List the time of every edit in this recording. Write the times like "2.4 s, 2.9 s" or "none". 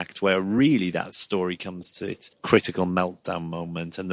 2.3 s